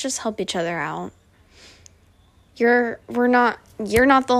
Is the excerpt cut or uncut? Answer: uncut